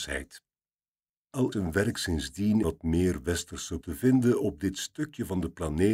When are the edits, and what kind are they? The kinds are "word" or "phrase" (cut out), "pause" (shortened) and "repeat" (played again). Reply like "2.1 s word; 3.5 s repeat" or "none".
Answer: 1.5 s word; 2.6 s word; 3.8 s word